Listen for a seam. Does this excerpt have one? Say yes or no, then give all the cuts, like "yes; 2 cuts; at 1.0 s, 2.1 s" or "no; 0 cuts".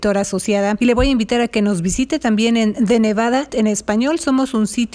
yes; 1 cut; at 3.5 s